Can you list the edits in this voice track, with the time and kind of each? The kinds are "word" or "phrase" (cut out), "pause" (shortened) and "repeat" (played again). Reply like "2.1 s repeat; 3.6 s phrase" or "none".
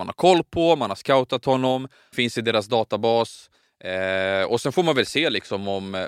2.1 s word